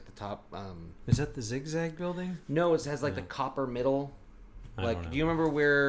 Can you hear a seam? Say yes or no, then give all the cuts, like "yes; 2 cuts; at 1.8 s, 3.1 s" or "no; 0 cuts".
no; 0 cuts